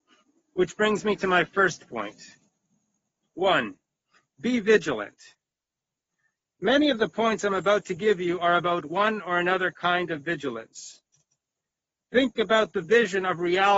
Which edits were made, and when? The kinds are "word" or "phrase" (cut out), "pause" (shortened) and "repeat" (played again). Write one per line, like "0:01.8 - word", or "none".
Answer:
none